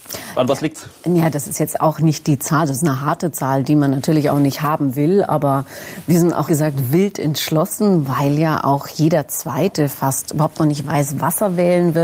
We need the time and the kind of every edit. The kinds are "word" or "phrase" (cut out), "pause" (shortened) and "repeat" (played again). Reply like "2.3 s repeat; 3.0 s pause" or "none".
1.0 s pause; 6.5 s word